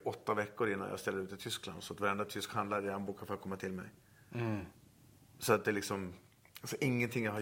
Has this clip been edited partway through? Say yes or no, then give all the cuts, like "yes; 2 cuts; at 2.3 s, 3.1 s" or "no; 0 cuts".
no; 0 cuts